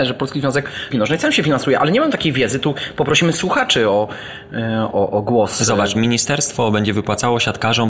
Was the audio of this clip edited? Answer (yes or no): yes